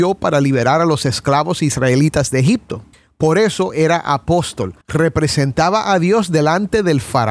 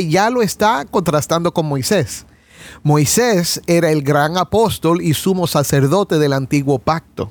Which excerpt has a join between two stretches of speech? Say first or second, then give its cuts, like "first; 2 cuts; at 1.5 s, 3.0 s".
first; 2 cuts; at 2.9 s, 4.8 s